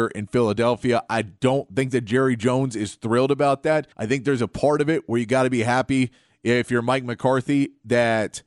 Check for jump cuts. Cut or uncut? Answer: cut